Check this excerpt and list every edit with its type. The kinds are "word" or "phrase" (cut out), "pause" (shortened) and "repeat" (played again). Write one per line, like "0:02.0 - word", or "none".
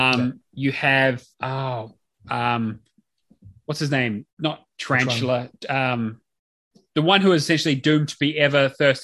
0:01.3 - pause
0:04.3 - pause
0:05.6 - pause